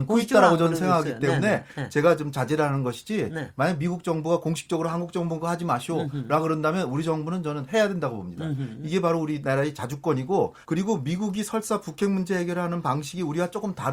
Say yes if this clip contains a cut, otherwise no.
yes